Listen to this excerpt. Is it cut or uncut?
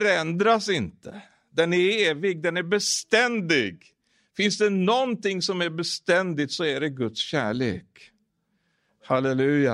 uncut